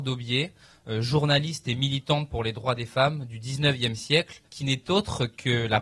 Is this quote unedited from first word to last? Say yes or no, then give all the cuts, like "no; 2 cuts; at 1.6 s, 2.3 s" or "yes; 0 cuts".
no; 1 cut; at 4.5 s